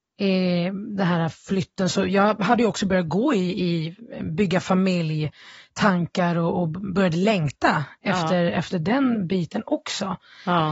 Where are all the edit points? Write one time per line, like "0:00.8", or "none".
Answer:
none